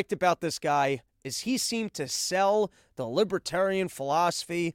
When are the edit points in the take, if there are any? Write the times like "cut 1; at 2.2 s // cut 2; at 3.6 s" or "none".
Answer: none